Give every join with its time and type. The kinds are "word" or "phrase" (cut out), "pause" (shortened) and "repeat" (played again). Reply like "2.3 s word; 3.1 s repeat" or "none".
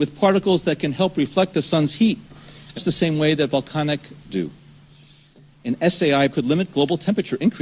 2.8 s word; 4.2 s word; 6.3 s word